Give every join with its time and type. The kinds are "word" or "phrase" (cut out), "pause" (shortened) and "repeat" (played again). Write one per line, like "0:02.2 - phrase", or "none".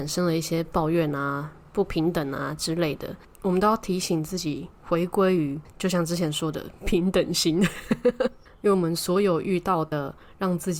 none